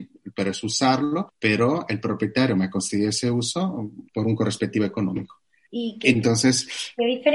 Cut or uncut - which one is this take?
uncut